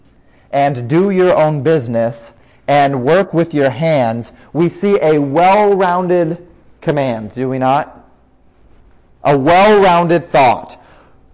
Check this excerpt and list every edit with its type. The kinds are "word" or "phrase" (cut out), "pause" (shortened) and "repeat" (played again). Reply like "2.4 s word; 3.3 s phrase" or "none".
none